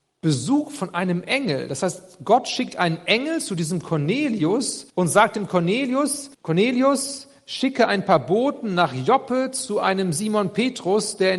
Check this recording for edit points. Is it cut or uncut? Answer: cut